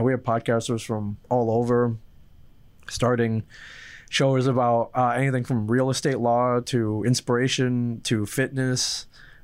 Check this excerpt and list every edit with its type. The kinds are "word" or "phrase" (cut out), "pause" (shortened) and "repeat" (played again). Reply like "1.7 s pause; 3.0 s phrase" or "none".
1.2 s pause